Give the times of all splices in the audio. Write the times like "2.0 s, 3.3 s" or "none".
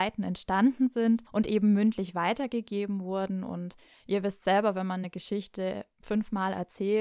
none